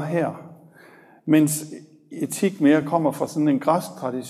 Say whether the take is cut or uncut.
uncut